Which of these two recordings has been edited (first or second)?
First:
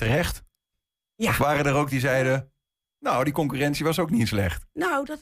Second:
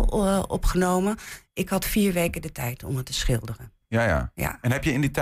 first